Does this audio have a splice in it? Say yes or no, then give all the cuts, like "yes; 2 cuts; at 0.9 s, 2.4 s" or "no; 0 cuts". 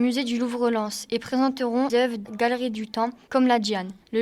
yes; 2 cuts; at 1.9 s, 2.2 s